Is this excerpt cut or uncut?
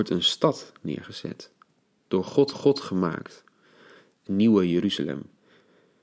cut